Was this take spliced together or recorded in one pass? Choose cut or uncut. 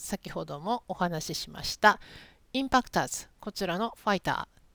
uncut